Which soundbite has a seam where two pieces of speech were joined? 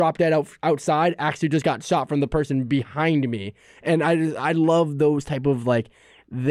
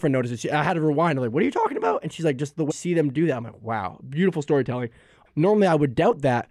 second; 2 cuts; at 2.7 s, 5.3 s

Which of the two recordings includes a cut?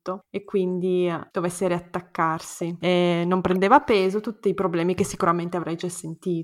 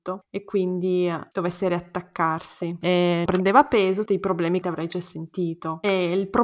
second; 3 cuts; at 3.3 s, 4.1 s, 4.6 s

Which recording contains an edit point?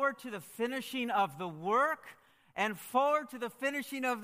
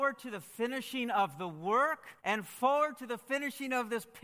second; 1 cut; at 2.2 s

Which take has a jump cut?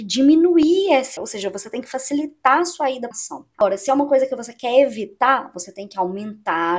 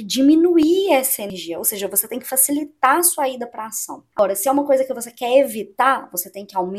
first; 2 cuts; at 1.2 s, 3.1 s

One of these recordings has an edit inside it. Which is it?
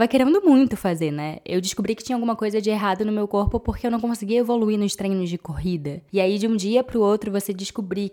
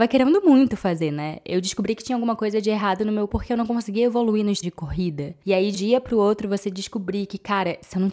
second; 3 cuts; at 3.3 s, 4.6 s, 5.7 s

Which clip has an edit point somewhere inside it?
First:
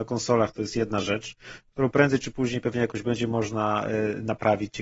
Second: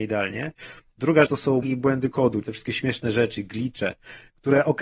second; 3 cuts; at 1.3 s, 1.6 s, 2.4 s

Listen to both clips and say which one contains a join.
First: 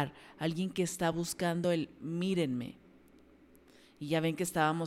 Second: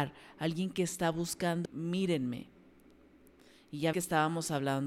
second; 2 cuts; at 1.7 s, 3.9 s

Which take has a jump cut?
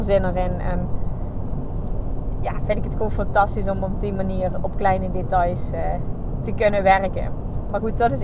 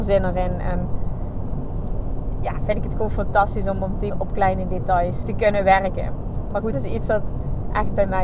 second; 3 cuts; at 4.1 s, 5.2 s, 6.7 s

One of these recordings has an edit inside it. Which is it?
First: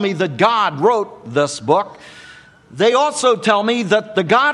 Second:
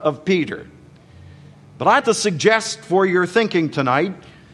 second; 1 cut; at 2.0 s

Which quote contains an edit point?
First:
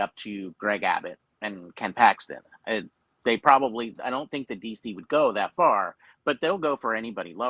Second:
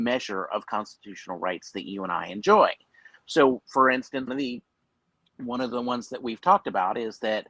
second; 1 cut; at 4.3 s

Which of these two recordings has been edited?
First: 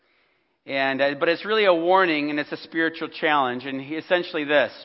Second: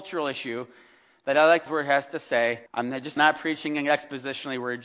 second; 3 cuts; at 1.7 s, 2.7 s, 3.2 s

